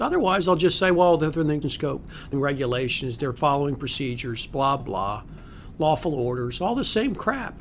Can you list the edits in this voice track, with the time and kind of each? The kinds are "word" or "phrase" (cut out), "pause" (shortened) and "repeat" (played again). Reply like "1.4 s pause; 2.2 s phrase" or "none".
1.6 s word; 2.3 s word; 4.8 s word

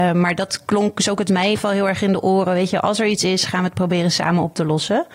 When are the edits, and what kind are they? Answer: 1.2 s word; 1.6 s word

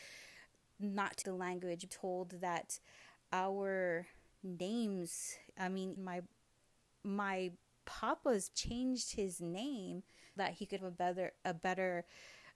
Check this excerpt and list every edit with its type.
1.2 s word; 1.9 s word; 6.0 s word; 8.5 s word; 10.4 s word; 10.8 s word

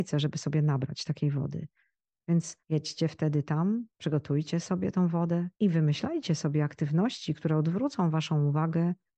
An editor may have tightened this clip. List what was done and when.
2.6 s pause; 3.9 s pause; 5.5 s pause

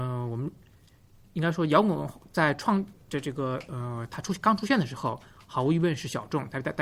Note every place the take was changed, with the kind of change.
3.0 s pause

